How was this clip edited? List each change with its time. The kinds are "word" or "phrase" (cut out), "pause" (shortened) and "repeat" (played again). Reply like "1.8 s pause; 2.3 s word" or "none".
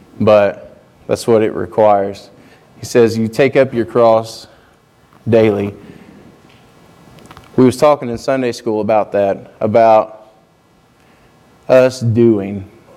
none